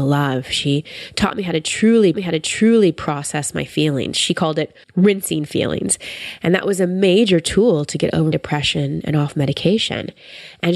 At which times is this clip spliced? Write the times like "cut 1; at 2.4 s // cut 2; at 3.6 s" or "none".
cut 1; at 2.1 s // cut 2; at 4.8 s // cut 3; at 8.3 s